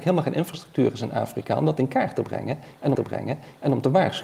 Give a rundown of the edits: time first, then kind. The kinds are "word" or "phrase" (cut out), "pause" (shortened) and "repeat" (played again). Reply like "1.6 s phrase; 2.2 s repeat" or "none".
2.9 s repeat